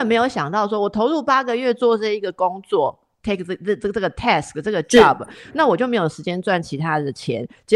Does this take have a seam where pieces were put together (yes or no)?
no